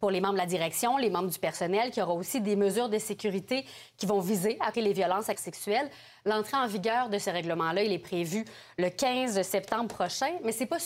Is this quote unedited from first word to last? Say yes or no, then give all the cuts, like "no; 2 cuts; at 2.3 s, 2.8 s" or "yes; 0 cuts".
no; 2 cuts; at 4.7 s, 5.4 s